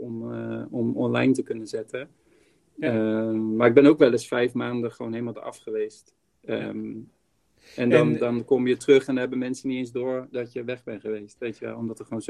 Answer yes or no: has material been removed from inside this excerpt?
no